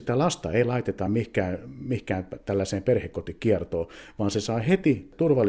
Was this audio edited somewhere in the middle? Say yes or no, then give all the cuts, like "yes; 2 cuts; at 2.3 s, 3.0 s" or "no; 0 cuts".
no; 0 cuts